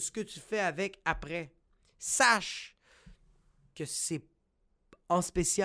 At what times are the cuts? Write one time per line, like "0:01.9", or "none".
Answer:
none

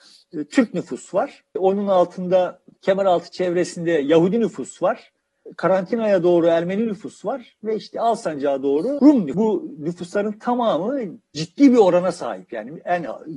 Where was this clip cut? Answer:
none

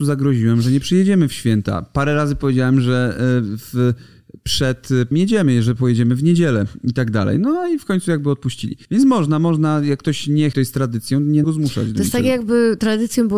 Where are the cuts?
0:05.1
0:08.8
0:10.5
0:11.4

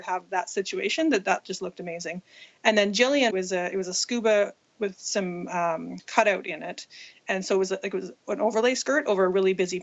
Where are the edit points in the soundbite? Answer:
0:03.3

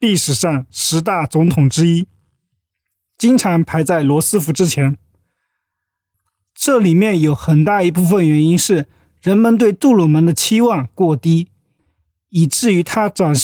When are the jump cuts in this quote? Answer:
none

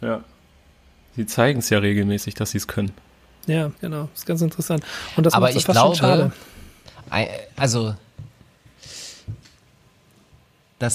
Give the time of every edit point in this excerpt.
0:03.8

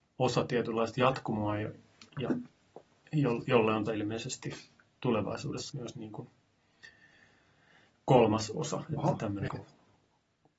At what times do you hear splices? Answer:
0:02.1
0:03.9
0:05.7
0:09.5

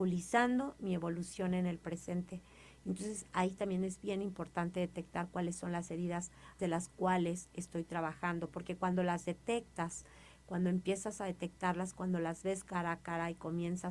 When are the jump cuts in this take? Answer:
0:06.6

